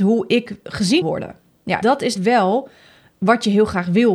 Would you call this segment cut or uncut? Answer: cut